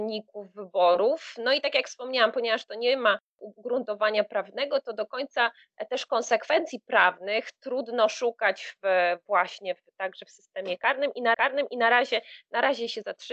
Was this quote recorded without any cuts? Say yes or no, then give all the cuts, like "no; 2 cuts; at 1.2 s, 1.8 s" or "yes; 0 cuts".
no; 1 cut; at 11.3 s